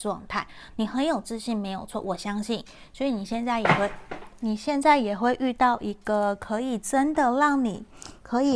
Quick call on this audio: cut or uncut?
uncut